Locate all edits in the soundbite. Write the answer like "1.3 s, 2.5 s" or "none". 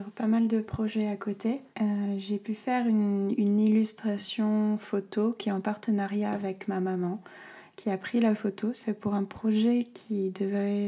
1.7 s